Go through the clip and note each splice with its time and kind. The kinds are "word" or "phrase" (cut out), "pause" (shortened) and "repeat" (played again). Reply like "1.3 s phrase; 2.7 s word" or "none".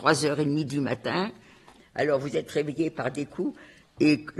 none

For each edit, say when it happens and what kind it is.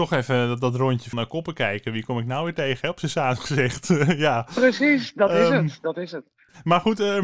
1.1 s word

